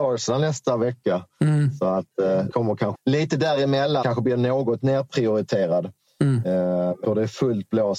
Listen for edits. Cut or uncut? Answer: cut